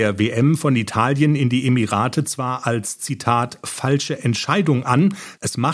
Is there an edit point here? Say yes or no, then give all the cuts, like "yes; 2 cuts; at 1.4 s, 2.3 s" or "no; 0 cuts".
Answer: no; 0 cuts